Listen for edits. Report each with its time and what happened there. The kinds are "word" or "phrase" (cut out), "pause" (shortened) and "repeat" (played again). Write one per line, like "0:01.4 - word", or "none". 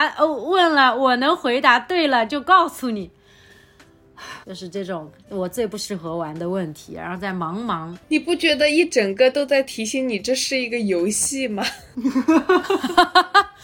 0:04.4 - pause
0:08.0 - pause